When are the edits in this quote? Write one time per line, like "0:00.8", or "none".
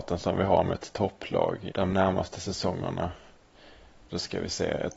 0:01.7